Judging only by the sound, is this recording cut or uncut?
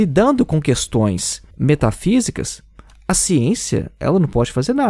cut